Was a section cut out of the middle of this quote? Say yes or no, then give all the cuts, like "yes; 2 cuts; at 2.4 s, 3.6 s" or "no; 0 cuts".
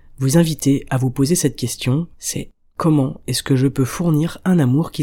yes; 1 cut; at 2.1 s